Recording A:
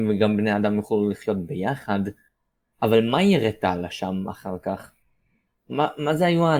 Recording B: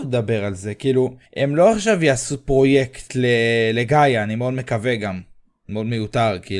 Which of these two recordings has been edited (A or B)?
B